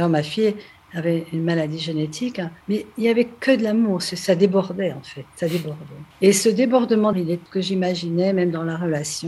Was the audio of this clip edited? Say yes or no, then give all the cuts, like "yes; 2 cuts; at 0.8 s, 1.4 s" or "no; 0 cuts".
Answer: yes; 4 cuts; at 2.6 s, 6.1 s, 7.1 s, 7.5 s